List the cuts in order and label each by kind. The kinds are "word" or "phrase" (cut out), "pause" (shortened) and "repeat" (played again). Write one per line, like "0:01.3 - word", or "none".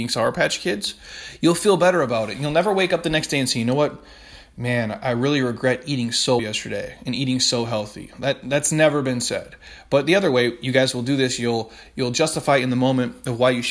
0:06.4 - word